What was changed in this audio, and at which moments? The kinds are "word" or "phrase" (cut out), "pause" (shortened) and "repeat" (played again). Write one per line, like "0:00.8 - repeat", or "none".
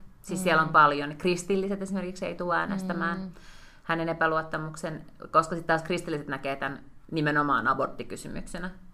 none